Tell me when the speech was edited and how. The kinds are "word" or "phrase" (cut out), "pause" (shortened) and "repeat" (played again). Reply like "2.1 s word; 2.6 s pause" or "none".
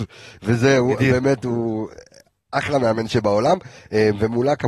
none